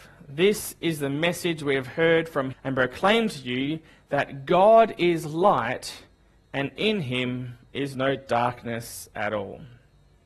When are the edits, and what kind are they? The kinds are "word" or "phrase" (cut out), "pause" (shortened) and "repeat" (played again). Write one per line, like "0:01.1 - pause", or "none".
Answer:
0:02.5 - word